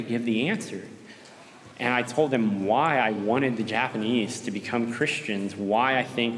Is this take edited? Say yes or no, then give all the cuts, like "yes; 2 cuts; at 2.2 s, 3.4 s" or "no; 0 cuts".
no; 0 cuts